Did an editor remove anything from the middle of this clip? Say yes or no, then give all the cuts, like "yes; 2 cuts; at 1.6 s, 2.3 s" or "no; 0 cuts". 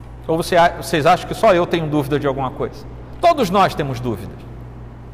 no; 0 cuts